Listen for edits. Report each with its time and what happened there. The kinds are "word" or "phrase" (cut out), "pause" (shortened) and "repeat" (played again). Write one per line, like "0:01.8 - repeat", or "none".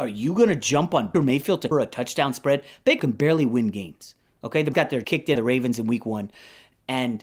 0:01.1 - word
0:01.7 - word
0:03.0 - word
0:04.7 - word
0:05.0 - word
0:05.4 - word